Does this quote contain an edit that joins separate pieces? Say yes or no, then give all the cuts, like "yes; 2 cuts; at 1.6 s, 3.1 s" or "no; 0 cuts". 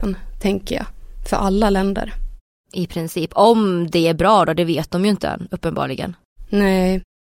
no; 0 cuts